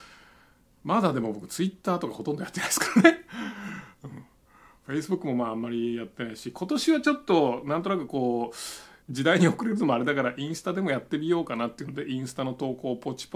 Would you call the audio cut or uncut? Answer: cut